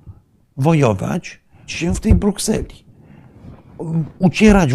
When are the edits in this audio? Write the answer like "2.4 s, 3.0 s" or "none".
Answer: 1.7 s